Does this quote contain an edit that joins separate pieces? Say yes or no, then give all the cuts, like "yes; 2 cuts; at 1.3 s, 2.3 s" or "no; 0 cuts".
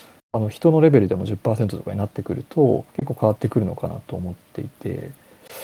yes; 1 cut; at 2.9 s